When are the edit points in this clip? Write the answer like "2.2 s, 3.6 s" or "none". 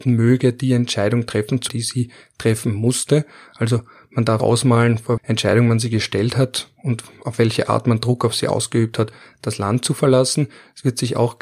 1.7 s, 4.4 s, 5.2 s